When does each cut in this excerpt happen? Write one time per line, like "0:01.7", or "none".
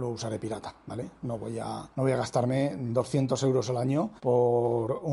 0:01.9
0:04.2